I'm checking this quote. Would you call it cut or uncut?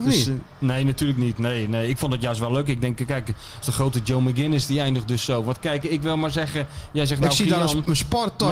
cut